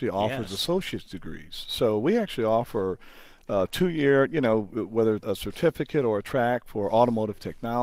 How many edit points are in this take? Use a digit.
1